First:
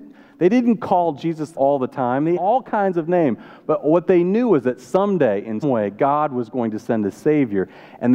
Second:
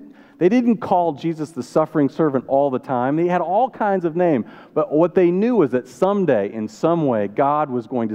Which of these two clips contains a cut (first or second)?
first